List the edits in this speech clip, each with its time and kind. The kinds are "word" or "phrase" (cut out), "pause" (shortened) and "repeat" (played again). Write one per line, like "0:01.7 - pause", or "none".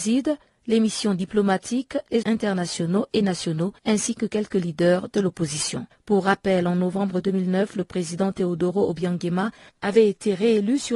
0:02.2 - word
0:03.8 - pause
0:05.9 - pause